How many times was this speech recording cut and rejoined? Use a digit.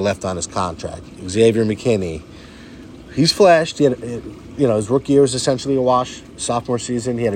0